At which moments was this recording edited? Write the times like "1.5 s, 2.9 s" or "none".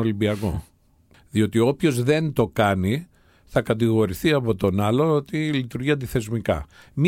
none